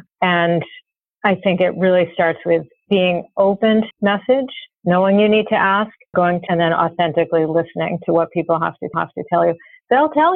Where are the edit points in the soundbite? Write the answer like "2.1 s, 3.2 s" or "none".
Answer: 3.9 s, 4.7 s, 6.1 s, 6.5 s, 8.9 s

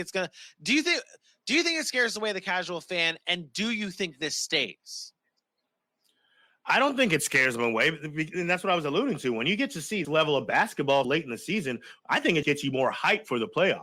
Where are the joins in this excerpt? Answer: 10.0 s, 11.0 s, 12.4 s

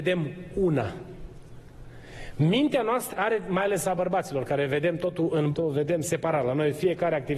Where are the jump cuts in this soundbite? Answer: 3.1 s, 5.5 s

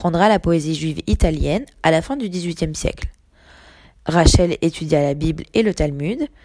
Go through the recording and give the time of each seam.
none

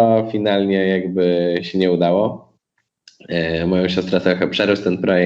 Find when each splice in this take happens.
none

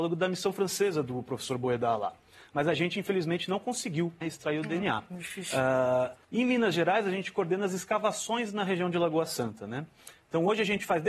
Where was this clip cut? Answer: 4.2 s, 6.2 s

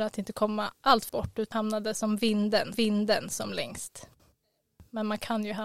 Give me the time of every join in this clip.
1.1 s, 1.5 s, 2.7 s

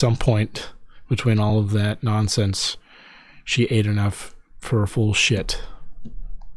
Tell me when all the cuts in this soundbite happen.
none

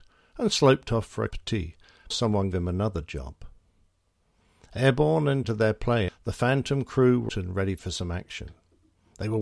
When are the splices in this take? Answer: 1.3 s, 2.1 s, 2.5 s, 5.4 s, 6.1 s, 7.3 s

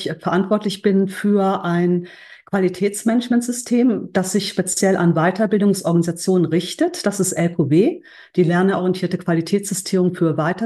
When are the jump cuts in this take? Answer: none

